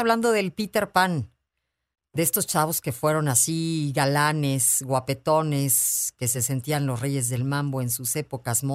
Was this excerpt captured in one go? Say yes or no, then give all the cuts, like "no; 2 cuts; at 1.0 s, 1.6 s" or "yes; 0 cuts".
yes; 0 cuts